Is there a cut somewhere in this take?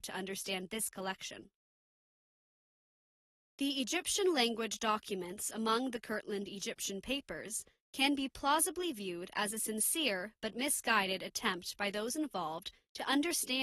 no; 0 cuts

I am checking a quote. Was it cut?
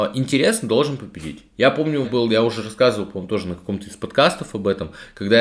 yes; 1 cut; at 2.0 s

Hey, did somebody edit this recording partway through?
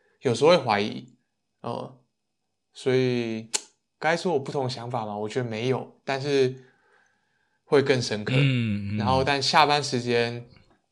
no; 0 cuts

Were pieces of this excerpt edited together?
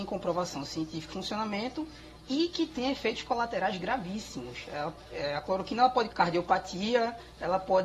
yes; 2 cuts; at 1.1 s, 6.1 s

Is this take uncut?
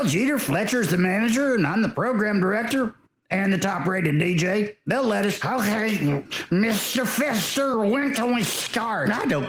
yes; 0 cuts

